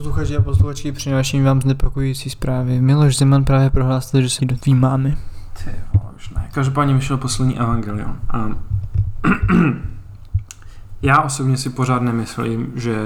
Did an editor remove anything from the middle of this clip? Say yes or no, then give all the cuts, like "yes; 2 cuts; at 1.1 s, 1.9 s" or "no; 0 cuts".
yes; 1 cut; at 4.4 s